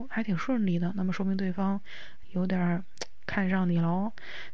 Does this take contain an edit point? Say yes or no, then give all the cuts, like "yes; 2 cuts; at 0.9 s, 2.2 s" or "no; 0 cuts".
yes; 1 cut; at 2.2 s